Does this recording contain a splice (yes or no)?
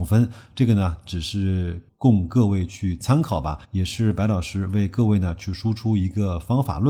yes